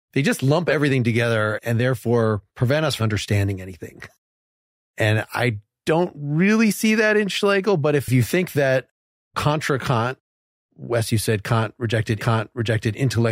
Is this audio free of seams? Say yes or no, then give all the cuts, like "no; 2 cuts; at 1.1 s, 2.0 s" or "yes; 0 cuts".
no; 3 cuts; at 2.5 s, 3.0 s, 12.2 s